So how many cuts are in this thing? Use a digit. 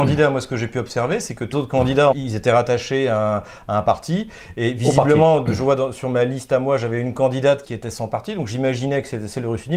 3